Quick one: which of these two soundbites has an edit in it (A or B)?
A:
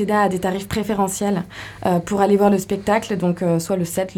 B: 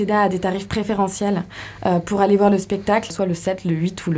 B